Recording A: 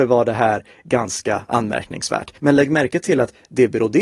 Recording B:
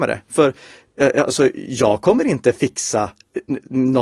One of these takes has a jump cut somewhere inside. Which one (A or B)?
A